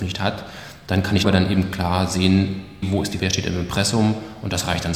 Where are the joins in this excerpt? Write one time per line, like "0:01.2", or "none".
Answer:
0:01.2
0:02.8
0:03.2

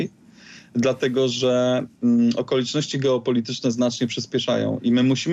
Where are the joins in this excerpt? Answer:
none

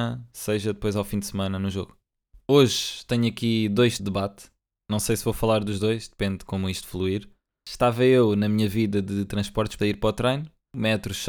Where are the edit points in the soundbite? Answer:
0:04.0
0:09.8

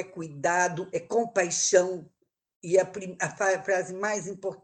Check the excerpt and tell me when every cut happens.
0:00.9

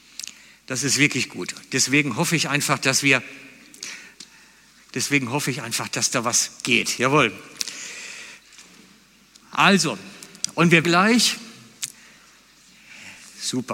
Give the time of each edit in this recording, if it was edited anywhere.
0:10.8

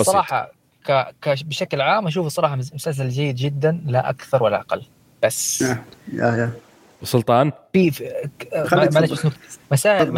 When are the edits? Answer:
none

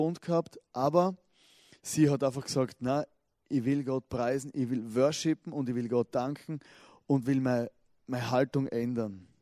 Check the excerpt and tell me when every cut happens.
none

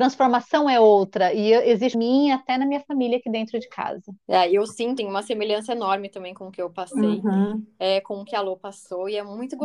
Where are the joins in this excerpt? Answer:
0:01.9
0:04.2
0:05.0

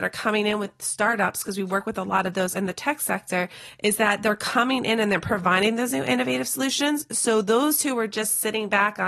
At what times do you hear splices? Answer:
0:02.5

